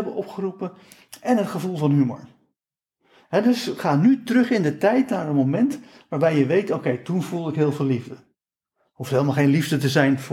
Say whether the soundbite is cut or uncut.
uncut